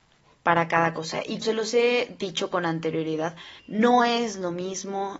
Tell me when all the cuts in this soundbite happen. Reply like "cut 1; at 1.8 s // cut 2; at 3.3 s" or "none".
cut 1; at 1.4 s // cut 2; at 3.6 s